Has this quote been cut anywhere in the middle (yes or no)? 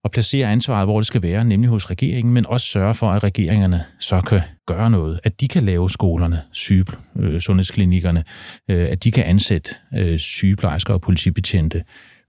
yes